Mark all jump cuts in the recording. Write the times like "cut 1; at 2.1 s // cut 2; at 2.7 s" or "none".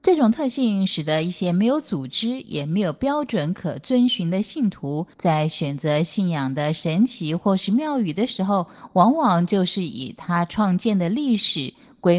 cut 1; at 5.1 s